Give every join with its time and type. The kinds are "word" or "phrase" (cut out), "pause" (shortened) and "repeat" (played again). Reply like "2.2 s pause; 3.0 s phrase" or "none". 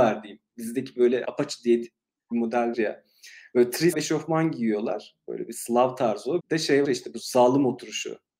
1.2 s word; 2.3 s word; 2.7 s word; 3.9 s word; 6.4 s word; 6.8 s word